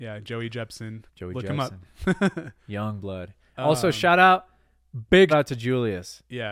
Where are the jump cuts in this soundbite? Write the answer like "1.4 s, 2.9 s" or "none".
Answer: 1.1 s, 5.3 s